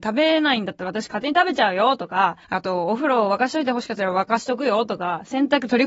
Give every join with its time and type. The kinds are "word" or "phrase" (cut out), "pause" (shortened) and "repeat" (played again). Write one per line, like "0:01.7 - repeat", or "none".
0:02.4 - pause